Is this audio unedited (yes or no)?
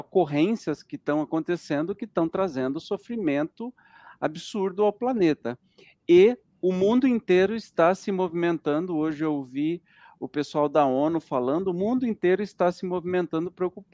yes